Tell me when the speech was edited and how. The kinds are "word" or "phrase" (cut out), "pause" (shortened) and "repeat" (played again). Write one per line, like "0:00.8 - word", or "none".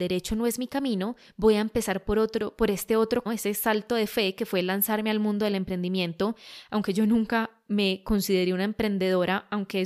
0:03.3 - word